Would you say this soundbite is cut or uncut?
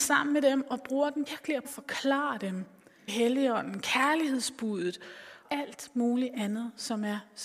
cut